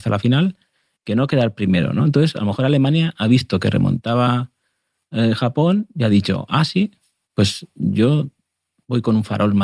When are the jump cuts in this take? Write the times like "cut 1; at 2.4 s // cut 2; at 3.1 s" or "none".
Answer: none

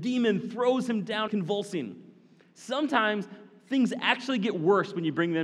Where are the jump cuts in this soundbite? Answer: cut 1; at 1.3 s

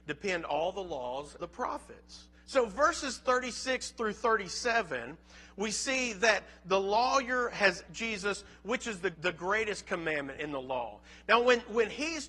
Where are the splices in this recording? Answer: cut 1; at 1.4 s // cut 2; at 2.3 s // cut 3; at 7.8 s // cut 4; at 9.1 s

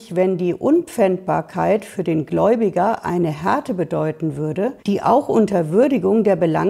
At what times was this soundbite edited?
cut 1; at 4.8 s

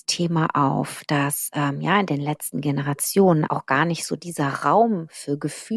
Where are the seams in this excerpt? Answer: cut 1; at 3.5 s

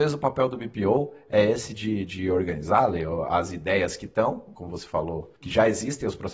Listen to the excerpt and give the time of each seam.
cut 1; at 5.4 s

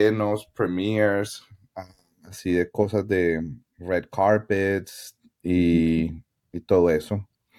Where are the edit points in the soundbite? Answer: cut 1; at 3.7 s

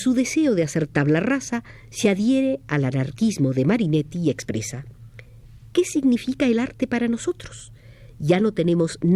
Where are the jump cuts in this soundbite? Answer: none

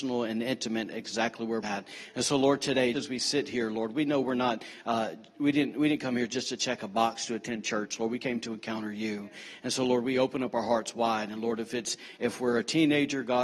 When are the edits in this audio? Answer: cut 1; at 1.6 s // cut 2; at 2.9 s

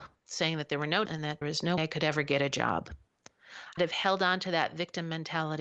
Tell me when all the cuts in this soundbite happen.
cut 1; at 1.1 s // cut 2; at 1.4 s // cut 3; at 1.8 s // cut 4; at 3.8 s

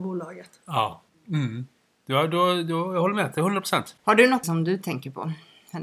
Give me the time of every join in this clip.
cut 1; at 4.4 s

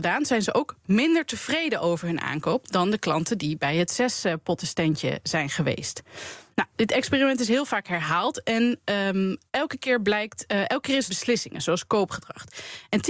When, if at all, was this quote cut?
cut 1; at 9.5 s // cut 2; at 11.1 s

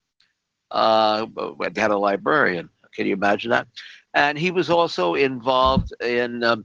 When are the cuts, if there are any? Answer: cut 1; at 1.8 s

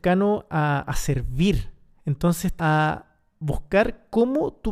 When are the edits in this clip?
cut 1; at 2.6 s

